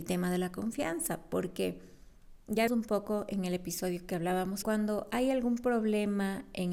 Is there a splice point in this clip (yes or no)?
yes